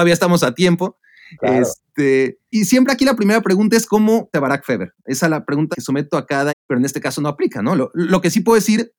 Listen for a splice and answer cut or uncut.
cut